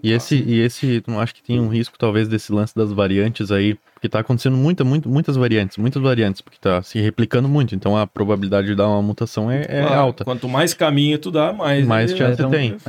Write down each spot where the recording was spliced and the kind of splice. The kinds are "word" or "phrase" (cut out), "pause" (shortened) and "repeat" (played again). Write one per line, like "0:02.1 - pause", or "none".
0:03.9 - pause